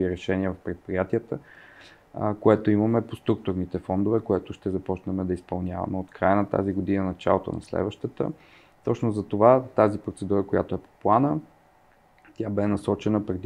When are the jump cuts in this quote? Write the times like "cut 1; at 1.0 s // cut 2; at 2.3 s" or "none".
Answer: none